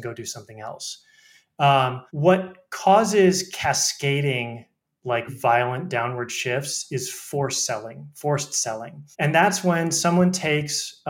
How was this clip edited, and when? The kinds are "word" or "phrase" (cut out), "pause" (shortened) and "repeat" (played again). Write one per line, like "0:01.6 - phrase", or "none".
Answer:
0:02.1 - pause
0:05.3 - word
0:09.1 - pause